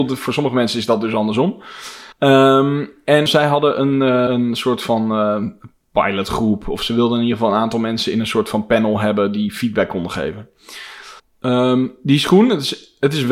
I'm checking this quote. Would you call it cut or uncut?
cut